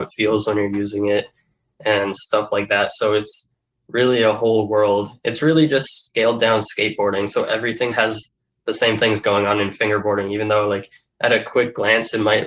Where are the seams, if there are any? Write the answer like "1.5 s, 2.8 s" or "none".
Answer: 7.9 s

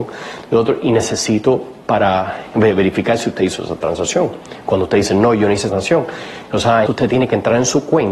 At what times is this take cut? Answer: 5.7 s, 6.9 s

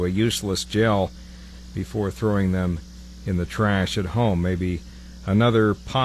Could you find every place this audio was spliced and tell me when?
none

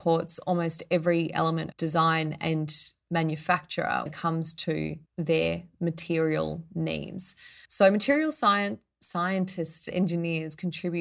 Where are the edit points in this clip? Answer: 1.7 s, 4.1 s, 5.1 s, 7.6 s, 9.9 s

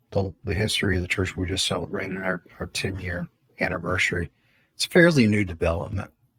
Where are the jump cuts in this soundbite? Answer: none

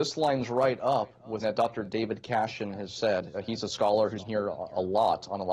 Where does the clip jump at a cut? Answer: 1.4 s, 4.2 s

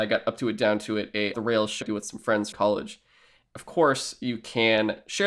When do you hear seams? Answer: 1.3 s, 1.8 s, 2.5 s, 3.5 s

